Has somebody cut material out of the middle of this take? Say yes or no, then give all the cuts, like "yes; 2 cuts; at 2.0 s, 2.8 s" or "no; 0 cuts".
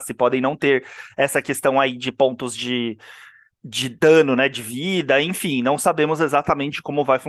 no; 0 cuts